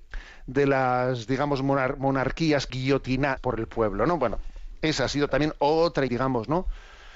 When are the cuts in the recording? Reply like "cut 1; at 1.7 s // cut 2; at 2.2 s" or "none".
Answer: cut 1; at 2.7 s // cut 2; at 3.4 s // cut 3; at 6.1 s